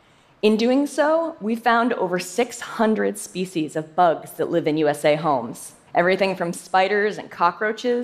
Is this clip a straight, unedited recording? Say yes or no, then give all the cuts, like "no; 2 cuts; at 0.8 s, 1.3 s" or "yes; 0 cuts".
no; 1 cut; at 5.9 s